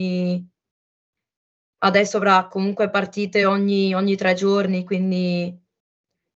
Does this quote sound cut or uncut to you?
uncut